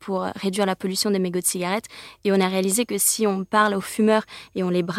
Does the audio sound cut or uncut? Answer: uncut